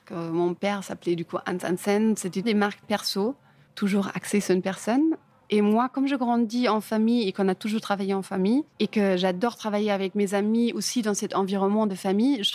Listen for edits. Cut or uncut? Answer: cut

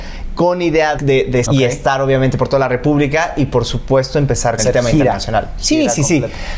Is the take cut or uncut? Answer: cut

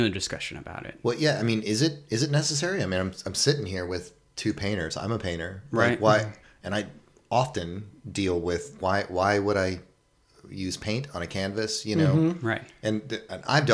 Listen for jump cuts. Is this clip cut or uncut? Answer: cut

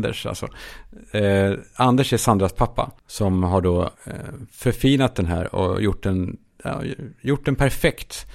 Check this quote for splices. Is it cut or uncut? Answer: cut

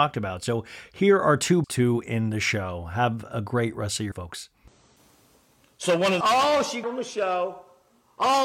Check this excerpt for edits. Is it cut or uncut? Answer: cut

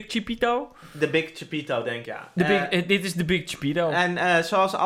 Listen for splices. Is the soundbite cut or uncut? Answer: cut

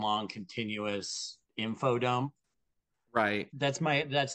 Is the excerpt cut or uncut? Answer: cut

